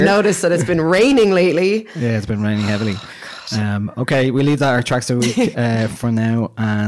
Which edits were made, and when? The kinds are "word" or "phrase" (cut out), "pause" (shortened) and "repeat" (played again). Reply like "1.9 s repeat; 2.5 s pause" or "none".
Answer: none